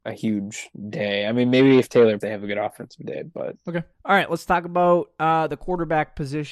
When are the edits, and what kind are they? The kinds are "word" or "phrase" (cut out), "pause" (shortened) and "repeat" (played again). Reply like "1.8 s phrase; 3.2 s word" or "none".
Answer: 2.2 s word; 3.9 s pause